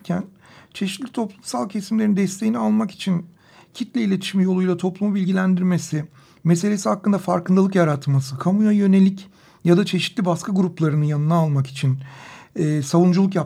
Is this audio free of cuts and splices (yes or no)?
yes